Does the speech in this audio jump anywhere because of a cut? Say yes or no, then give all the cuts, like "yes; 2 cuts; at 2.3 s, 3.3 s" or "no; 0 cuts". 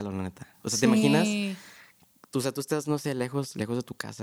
no; 0 cuts